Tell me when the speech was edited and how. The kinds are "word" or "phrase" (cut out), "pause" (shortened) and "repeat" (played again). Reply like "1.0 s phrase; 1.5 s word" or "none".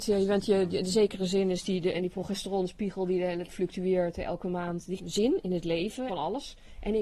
1.9 s word; 3.5 s word; 5.0 s word; 6.1 s phrase